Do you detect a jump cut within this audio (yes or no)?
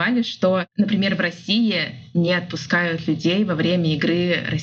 no